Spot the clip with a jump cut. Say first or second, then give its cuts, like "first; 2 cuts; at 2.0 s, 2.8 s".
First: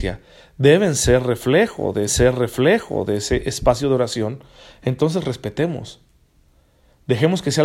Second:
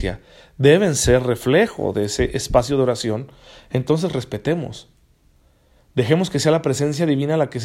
first; 1 cut; at 2.1 s